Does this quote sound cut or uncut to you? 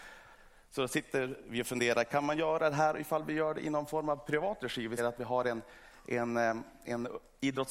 cut